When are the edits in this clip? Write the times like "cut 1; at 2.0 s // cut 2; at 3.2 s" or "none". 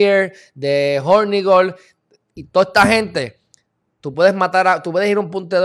none